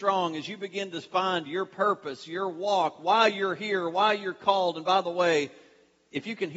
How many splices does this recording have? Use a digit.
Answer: 0